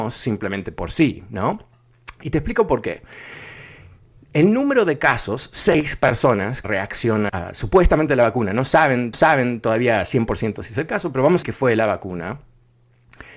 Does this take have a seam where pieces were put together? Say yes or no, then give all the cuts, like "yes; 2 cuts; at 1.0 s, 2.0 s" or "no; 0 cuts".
yes; 4 cuts; at 6.6 s, 7.3 s, 9.1 s, 11.4 s